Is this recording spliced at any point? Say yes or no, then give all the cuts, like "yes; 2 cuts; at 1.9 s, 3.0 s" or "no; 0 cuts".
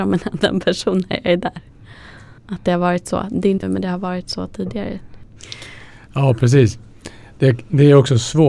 yes; 2 cuts; at 2.4 s, 3.6 s